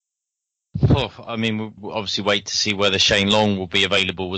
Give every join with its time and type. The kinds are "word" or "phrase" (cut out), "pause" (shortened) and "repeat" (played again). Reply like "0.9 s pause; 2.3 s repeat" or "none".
1.8 s word